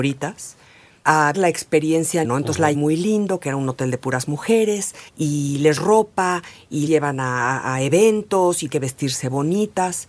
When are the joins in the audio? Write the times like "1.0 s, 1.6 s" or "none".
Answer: 1.3 s, 2.2 s, 2.7 s, 5.1 s, 5.8 s, 6.9 s, 8.7 s